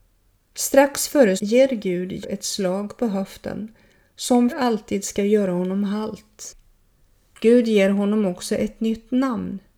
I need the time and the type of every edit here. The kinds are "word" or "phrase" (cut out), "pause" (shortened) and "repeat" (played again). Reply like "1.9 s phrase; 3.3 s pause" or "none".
1.4 s word; 2.2 s word; 4.5 s word